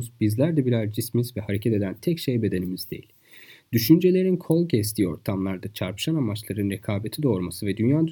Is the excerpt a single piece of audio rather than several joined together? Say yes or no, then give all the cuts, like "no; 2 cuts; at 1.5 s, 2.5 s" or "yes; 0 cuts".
yes; 0 cuts